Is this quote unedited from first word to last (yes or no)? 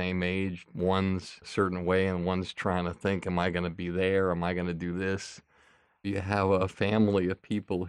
yes